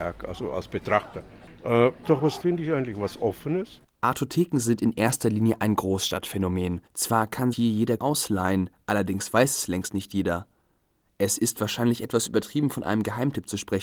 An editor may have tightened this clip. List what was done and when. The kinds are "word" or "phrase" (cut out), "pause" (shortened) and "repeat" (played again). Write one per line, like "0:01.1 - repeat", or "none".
0:02.0 - word
0:02.4 - word
0:06.9 - pause
0:07.5 - word
0:08.0 - word